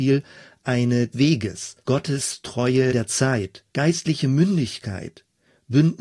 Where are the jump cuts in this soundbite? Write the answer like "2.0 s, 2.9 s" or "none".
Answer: 1.1 s, 1.8 s, 2.9 s, 3.7 s

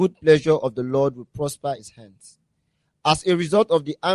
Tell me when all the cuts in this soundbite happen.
1.8 s

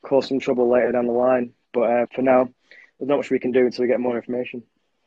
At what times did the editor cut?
2.0 s

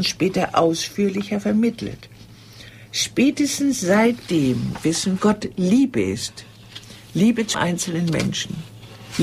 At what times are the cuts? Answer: 5.2 s, 7.5 s

